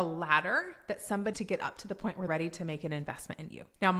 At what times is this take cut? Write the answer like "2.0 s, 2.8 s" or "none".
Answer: 1.3 s, 2.3 s